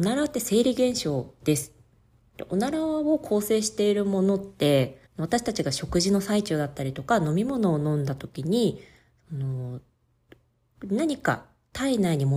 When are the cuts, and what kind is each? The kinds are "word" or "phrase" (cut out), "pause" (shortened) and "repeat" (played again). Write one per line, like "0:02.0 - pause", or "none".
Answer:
0:05.1 - pause

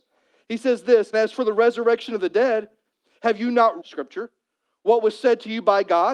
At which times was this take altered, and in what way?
0:01.1 - word
0:03.8 - word

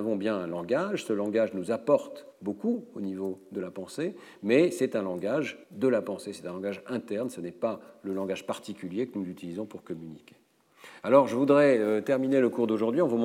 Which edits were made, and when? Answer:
0:02.3 - pause
0:05.6 - pause

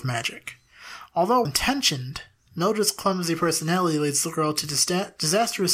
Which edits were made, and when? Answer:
0:01.5 - word

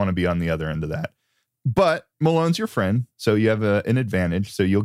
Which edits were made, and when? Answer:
0:02.1 - pause
0:03.1 - pause

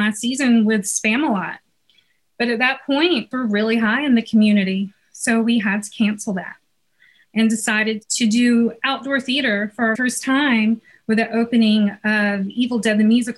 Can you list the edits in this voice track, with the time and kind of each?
0:03.3 - word
0:09.9 - word

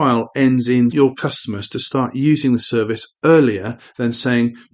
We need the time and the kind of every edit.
0:00.9 - phrase

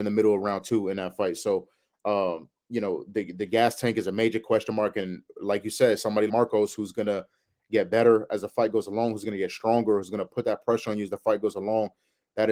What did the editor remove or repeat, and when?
0:06.3 - word

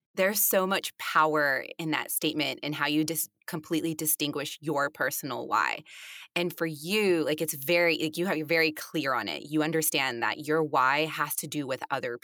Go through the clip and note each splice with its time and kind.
none

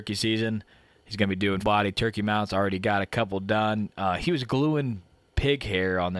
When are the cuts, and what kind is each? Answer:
0:01.6 - word

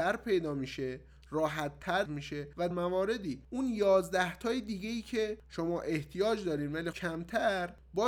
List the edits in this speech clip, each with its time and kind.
0:02.1 - word
0:02.7 - word
0:06.9 - word

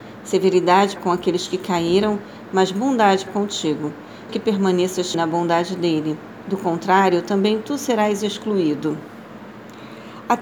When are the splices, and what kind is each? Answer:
0:01.0 - word
0:03.3 - word
0:04.3 - word
0:05.1 - word

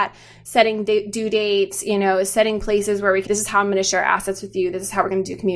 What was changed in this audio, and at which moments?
0:03.3 - word

